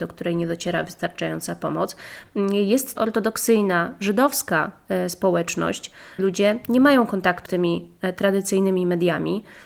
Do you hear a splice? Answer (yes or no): yes